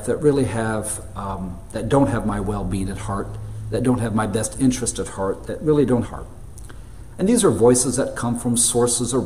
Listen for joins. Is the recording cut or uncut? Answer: cut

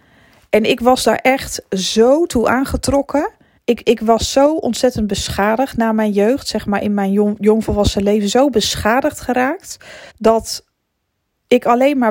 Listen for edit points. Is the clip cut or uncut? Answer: cut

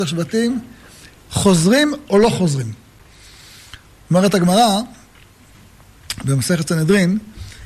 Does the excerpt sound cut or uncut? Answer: uncut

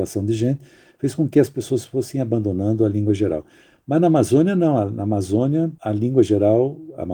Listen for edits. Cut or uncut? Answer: uncut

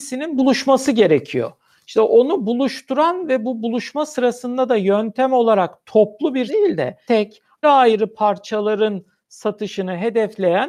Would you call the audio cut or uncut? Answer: cut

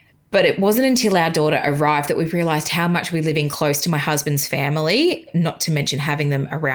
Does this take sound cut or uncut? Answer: uncut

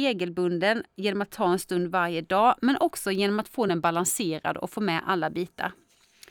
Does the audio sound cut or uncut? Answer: uncut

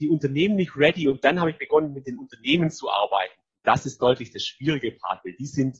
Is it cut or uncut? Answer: uncut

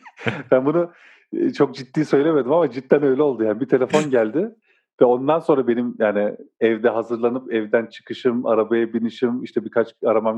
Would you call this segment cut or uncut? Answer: uncut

